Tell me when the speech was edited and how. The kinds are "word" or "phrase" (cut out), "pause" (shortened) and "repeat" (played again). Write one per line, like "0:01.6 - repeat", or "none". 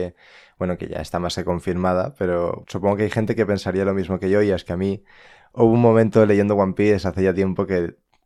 0:02.6 - word